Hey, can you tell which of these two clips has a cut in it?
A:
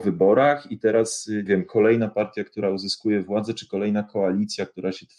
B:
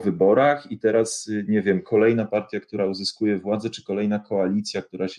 A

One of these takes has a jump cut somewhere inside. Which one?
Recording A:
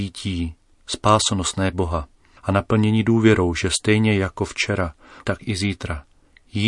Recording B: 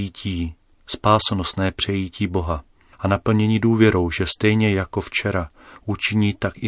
A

